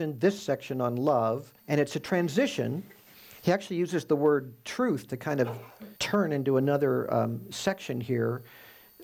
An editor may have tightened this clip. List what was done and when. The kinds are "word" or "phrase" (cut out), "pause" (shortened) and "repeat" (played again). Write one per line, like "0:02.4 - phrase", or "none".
0:01.6 - pause
0:03.1 - pause
0:06.0 - pause